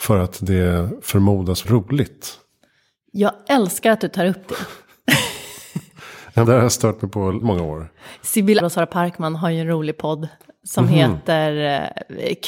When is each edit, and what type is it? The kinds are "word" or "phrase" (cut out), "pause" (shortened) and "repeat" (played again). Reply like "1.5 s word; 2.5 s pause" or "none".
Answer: 1.6 s word; 6.4 s word; 7.4 s word; 8.6 s word